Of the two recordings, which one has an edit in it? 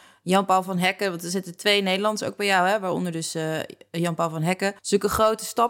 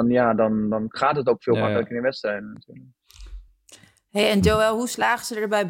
first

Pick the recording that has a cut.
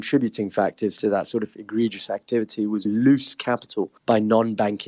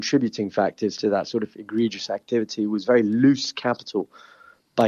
first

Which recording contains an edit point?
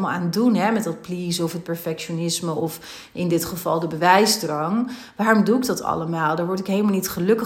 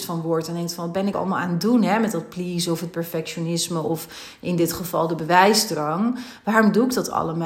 second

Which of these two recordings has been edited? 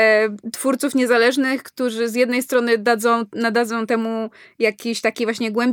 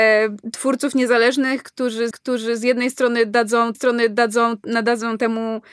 second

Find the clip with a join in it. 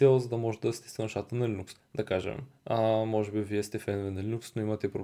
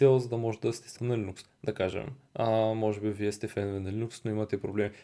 second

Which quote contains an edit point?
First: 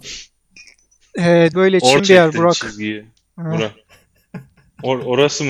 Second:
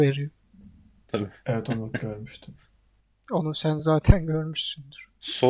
first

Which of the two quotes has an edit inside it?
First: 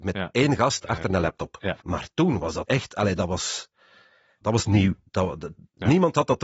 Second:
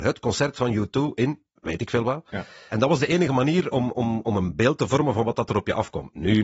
first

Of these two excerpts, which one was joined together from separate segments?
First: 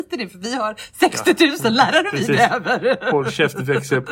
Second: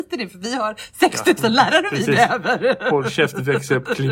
second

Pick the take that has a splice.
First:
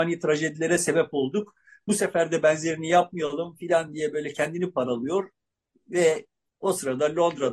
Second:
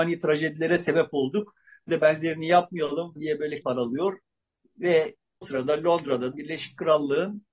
second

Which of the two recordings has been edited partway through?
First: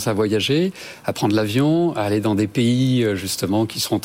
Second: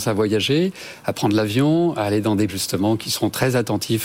second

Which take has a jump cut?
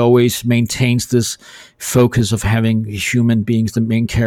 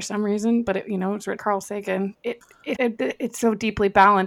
second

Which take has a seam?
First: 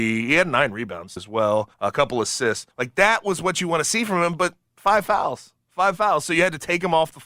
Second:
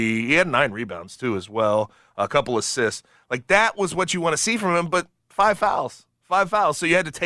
first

